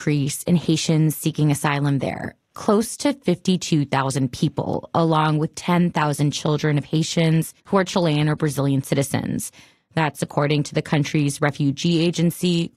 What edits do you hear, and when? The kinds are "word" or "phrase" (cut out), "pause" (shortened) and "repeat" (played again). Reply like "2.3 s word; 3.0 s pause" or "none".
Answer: 5.5 s word; 7.6 s pause